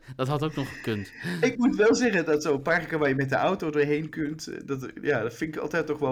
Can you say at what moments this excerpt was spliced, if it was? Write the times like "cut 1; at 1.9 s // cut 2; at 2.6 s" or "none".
none